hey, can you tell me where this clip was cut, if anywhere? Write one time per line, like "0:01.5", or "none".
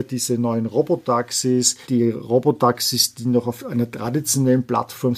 0:01.8